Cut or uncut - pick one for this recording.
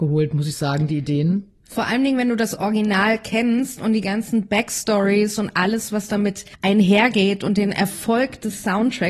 cut